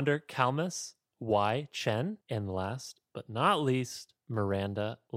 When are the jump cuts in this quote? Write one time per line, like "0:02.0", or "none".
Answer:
0:02.2
0:04.2